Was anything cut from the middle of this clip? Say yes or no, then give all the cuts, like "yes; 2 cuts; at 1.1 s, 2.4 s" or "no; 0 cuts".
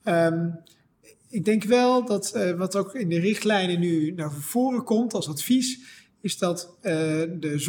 no; 0 cuts